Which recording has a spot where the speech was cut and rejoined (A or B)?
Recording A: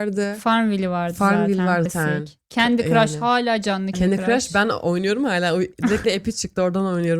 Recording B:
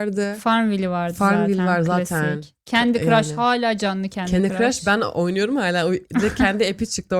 A